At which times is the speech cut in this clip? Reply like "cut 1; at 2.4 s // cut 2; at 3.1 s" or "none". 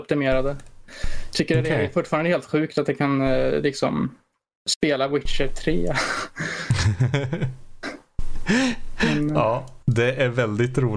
cut 1; at 9.8 s